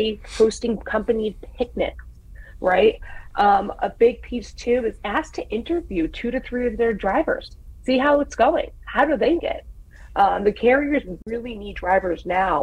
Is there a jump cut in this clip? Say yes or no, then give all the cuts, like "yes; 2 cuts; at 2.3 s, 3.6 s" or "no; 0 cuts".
yes; 2 cuts; at 5.0 s, 9.4 s